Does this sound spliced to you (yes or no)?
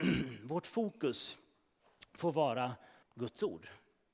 yes